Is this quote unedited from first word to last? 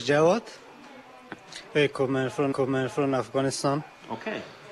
no; 1 cut; at 2.5 s

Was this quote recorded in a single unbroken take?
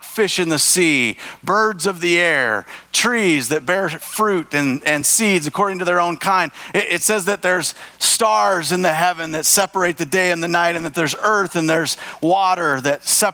yes; 0 cuts

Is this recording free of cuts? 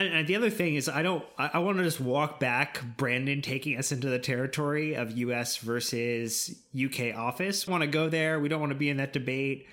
no; 1 cut; at 7.7 s

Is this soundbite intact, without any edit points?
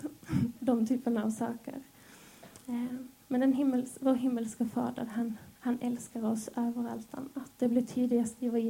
no; 1 cut; at 5.6 s

